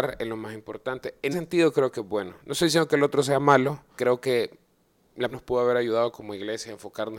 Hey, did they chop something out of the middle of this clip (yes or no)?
yes